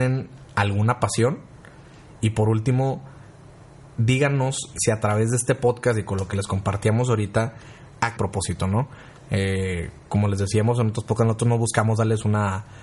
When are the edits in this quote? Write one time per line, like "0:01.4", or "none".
0:04.7
0:08.2